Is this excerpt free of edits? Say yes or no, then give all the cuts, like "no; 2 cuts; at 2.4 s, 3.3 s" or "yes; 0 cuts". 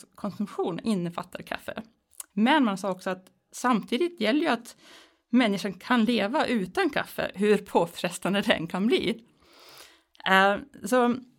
yes; 0 cuts